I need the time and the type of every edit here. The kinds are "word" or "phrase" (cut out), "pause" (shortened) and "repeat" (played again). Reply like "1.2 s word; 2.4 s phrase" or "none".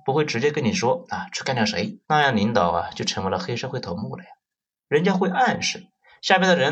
2.0 s pause